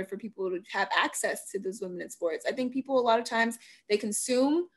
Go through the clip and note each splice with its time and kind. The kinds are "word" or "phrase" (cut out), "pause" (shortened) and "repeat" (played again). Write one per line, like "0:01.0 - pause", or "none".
none

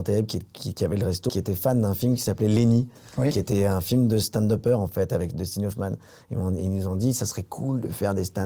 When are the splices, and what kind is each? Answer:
0:01.3 - word

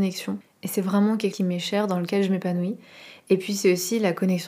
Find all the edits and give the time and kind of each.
0:01.3 - word

